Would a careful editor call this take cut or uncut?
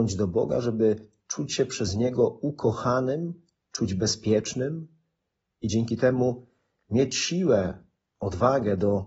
uncut